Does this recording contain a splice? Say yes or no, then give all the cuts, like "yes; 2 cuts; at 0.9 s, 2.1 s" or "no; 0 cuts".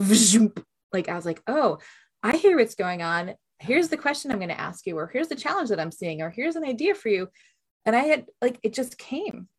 no; 0 cuts